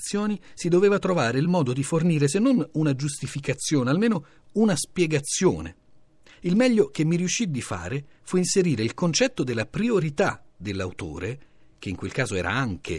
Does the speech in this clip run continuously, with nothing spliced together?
yes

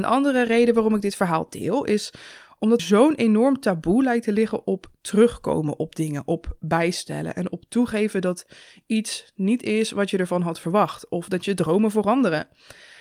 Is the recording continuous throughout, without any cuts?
no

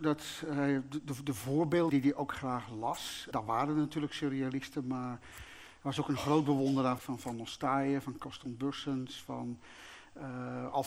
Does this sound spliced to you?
yes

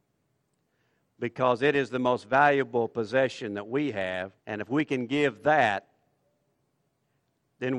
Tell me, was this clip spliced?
yes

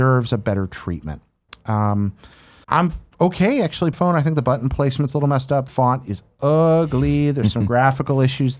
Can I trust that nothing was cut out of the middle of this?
no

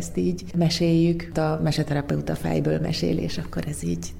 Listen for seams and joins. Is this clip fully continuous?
no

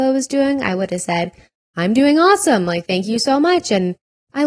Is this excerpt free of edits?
yes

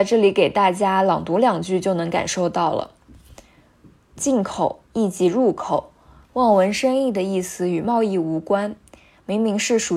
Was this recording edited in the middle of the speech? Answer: yes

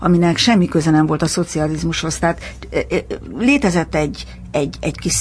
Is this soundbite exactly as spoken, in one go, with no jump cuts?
yes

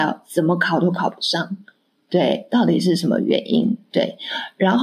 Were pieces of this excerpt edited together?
no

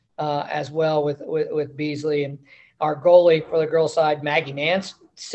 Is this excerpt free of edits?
yes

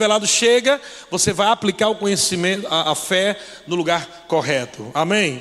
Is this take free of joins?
yes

